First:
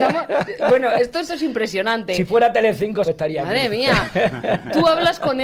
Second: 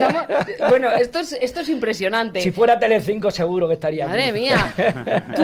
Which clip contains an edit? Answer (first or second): first